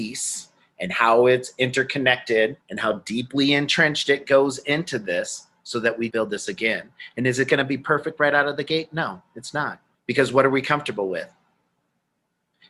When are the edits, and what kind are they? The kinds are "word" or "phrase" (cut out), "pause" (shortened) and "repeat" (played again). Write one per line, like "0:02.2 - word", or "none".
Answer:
0:02.6 - pause
0:06.1 - word
0:09.9 - pause